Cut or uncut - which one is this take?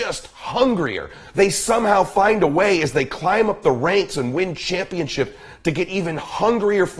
uncut